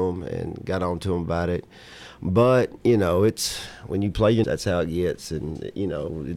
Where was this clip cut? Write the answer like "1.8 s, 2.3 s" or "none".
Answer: 4.4 s